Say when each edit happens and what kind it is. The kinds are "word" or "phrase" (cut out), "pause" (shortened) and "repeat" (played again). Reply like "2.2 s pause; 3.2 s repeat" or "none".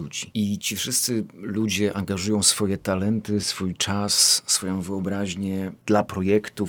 none